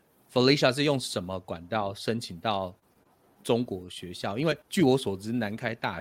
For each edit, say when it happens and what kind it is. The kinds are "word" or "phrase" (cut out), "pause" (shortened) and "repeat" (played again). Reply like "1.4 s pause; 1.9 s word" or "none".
4.6 s pause

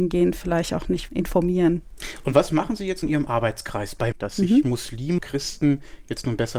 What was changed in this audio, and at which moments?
1.1 s word; 3.0 s word; 4.1 s word; 5.2 s word

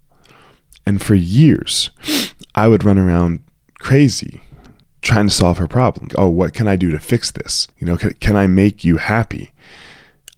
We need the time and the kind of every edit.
2.5 s pause; 4.8 s pause; 6.1 s word; 7.7 s pause

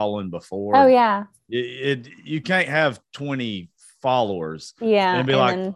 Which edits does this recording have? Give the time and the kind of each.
none

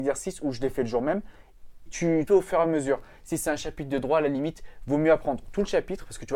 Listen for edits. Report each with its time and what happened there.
1.9 s word; 2.3 s phrase

